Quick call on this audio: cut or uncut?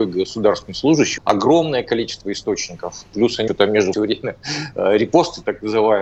cut